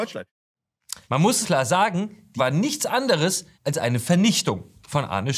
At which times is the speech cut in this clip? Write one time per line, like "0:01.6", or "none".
0:01.0
0:01.4
0:02.4
0:03.5

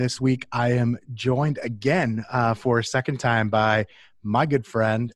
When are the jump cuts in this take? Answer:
none

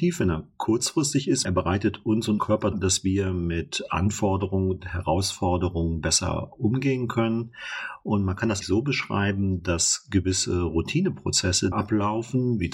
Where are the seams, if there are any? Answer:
0:01.4
0:02.4
0:02.7
0:08.6
0:11.7

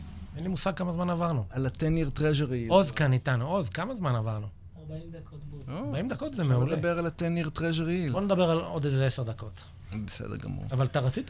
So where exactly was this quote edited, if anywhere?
none

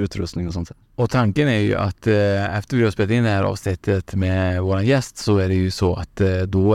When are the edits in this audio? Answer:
none

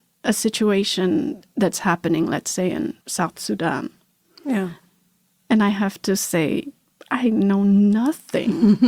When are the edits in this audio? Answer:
0:03.0

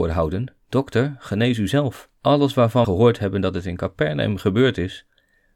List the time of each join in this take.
0:02.2
0:02.8

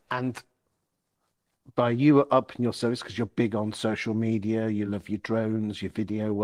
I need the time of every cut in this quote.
none

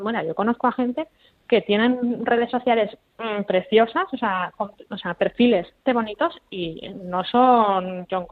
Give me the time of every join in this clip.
0:05.9

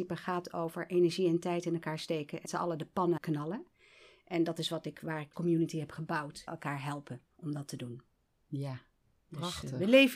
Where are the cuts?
0:02.5
0:03.2
0:05.3
0:06.5
0:07.3

